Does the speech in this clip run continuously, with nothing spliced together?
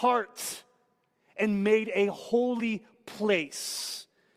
yes; 0 cuts

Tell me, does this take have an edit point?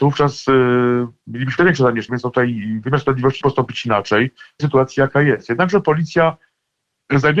yes; 4 cuts; at 1.6 s, 2.1 s, 3.4 s, 4.6 s

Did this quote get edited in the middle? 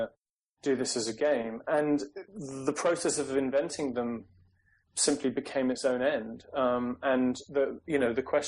yes; 1 cut; at 2.3 s

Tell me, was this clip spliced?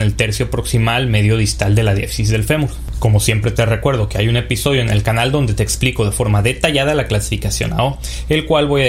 no; 0 cuts

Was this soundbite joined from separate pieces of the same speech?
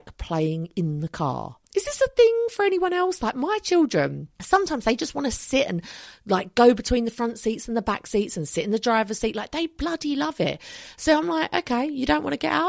yes; 2 cuts; at 1.6 s, 4.3 s

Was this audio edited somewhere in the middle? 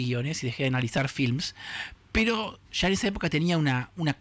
yes; 1 cut; at 2.6 s

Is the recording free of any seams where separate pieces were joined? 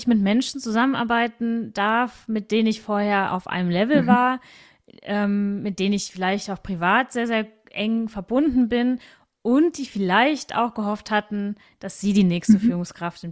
yes; 0 cuts

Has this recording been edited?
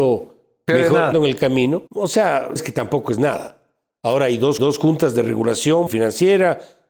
yes; 5 cuts; at 1.1 s, 1.9 s, 2.6 s, 4.6 s, 5.9 s

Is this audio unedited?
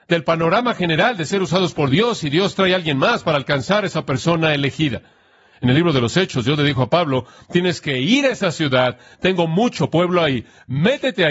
yes; 0 cuts

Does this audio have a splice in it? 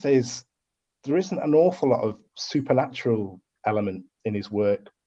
no; 0 cuts

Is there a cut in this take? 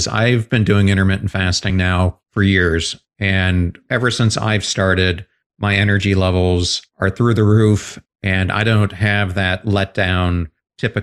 no; 0 cuts

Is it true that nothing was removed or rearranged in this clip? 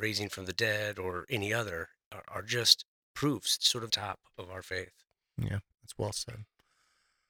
no; 3 cuts; at 3.6 s, 3.9 s, 5.7 s

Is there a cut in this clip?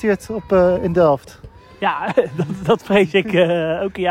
no; 0 cuts

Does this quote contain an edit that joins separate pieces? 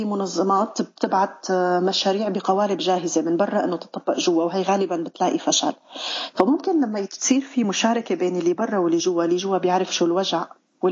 no; 0 cuts

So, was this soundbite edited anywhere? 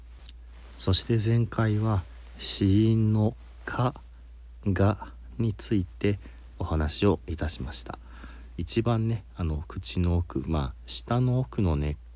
yes; 1 cut; at 8.6 s

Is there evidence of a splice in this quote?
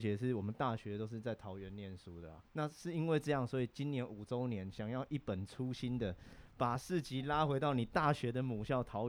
yes; 1 cut; at 2.4 s

